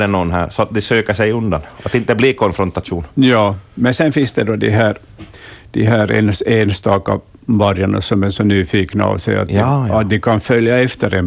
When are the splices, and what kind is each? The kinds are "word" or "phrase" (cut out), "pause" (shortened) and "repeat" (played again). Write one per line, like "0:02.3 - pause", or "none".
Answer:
none